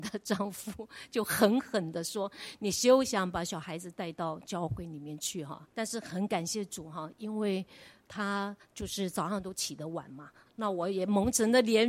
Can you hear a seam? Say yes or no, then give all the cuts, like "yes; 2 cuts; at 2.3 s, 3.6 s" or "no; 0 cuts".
yes; 2 cuts; at 5.7 s, 10.5 s